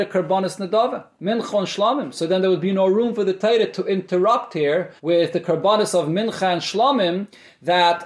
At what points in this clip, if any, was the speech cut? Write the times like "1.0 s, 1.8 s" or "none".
5.0 s

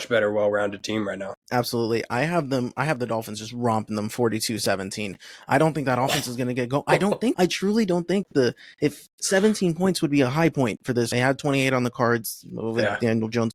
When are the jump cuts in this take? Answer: 1.4 s, 7.3 s, 11.1 s

